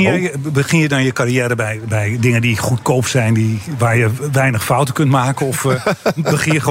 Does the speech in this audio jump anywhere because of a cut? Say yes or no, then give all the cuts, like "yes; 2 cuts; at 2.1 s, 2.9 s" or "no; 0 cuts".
no; 0 cuts